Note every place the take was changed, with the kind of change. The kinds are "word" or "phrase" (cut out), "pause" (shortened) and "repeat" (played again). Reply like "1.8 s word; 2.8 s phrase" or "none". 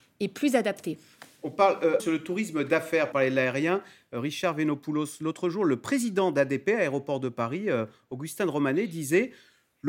2.0 s phrase; 3.1 s word